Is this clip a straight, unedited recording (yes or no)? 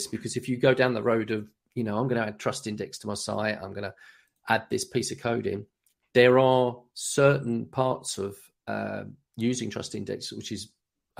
yes